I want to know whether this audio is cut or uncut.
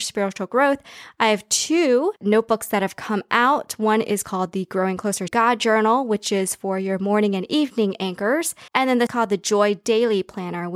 cut